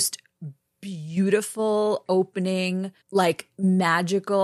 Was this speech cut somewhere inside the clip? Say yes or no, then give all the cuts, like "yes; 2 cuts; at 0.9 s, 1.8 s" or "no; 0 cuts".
yes; 2 cuts; at 2.1 s, 3.0 s